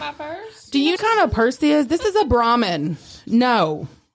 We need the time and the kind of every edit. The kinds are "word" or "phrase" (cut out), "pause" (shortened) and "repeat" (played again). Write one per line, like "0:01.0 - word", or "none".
0:01.0 - phrase
0:01.6 - word